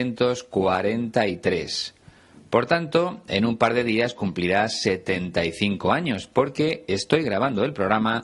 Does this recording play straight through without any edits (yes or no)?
yes